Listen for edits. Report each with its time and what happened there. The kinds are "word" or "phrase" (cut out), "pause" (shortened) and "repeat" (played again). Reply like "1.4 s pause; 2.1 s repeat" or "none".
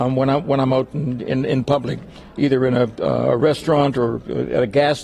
none